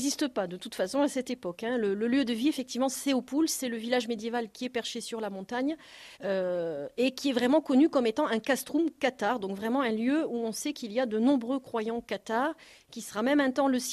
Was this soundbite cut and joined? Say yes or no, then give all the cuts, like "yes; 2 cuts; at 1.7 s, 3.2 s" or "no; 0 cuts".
yes; 1 cut; at 6.1 s